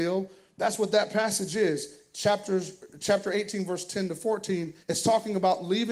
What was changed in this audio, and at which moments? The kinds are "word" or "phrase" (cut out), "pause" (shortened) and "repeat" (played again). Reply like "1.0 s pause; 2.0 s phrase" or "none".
4.8 s pause